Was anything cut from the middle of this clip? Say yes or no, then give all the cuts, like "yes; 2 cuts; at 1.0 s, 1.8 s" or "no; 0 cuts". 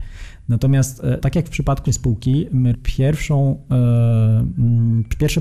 yes; 3 cuts; at 1.2 s, 1.9 s, 2.7 s